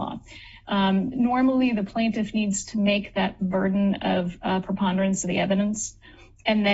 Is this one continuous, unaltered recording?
yes; 0 cuts

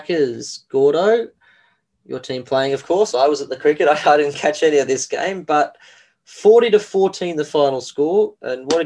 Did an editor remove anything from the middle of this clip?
no; 0 cuts

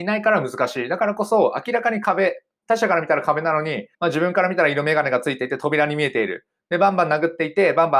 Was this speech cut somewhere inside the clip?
yes; 1 cut; at 3.9 s

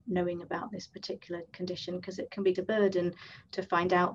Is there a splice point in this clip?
yes; 2 cuts; at 1.5 s, 2.5 s

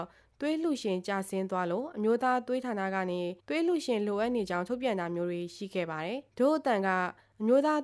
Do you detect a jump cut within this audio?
yes; 2 cuts; at 3.4 s, 6.3 s

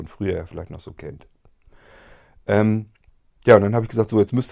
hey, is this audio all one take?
yes; 0 cuts

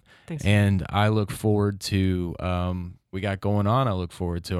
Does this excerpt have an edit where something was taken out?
yes; 1 cut; at 3.1 s

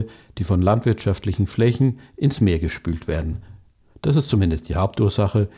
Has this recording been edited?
no; 0 cuts

